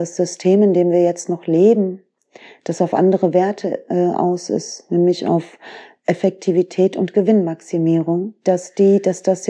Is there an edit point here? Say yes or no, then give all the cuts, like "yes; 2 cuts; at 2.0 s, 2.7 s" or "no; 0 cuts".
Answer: no; 0 cuts